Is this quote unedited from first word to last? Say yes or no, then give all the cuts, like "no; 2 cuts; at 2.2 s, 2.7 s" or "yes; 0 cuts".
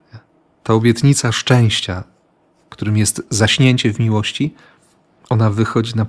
yes; 0 cuts